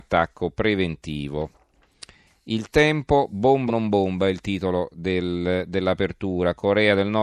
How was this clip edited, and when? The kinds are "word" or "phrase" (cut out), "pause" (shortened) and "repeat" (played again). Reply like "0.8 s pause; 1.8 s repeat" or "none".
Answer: 3.7 s word